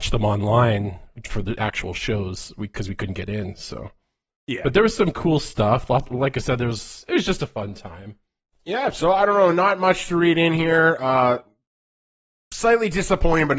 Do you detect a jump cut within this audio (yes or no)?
no